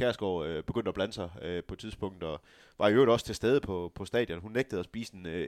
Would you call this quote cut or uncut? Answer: uncut